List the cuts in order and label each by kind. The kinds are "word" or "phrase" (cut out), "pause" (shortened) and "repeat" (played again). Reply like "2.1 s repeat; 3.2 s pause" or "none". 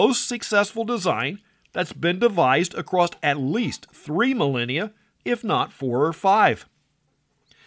none